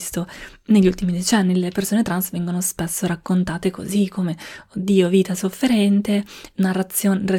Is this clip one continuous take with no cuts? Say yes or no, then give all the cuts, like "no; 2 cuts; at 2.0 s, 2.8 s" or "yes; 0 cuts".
yes; 0 cuts